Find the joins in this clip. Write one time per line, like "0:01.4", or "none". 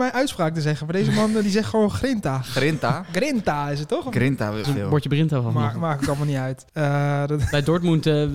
0:04.6
0:06.7